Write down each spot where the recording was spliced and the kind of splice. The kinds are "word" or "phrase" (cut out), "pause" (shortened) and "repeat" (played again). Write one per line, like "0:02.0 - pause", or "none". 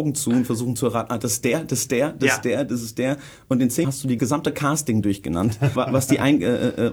0:03.8 - word
0:04.2 - word
0:05.8 - word